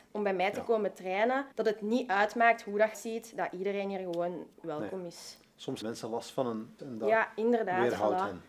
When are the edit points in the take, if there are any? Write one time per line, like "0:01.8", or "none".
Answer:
0:01.5
0:02.9
0:04.5
0:05.8
0:06.8